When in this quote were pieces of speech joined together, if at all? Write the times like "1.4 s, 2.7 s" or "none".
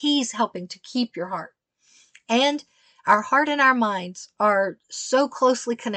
none